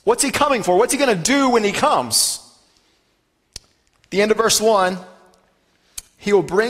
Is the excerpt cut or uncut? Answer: uncut